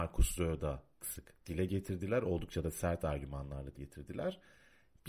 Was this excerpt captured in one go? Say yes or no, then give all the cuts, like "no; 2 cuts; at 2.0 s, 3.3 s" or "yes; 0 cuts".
no; 2 cuts; at 1.0 s, 3.7 s